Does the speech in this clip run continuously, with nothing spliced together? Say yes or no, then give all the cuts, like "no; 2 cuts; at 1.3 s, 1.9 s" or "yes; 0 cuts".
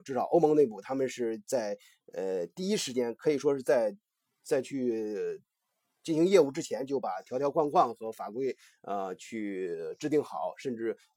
yes; 0 cuts